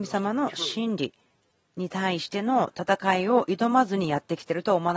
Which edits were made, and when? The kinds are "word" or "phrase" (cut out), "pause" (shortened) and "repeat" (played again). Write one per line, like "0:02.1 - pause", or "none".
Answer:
none

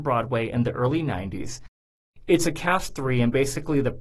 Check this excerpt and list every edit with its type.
0:02.9 - word

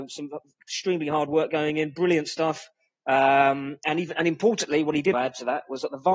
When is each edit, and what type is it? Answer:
0:05.1 - word

